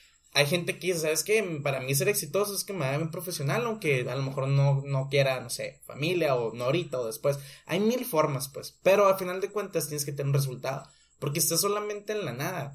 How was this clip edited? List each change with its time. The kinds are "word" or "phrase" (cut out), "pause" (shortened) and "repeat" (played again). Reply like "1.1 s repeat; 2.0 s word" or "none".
none